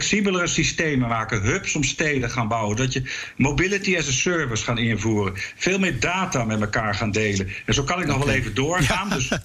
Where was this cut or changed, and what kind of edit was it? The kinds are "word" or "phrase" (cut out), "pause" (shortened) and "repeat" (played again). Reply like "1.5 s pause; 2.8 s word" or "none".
none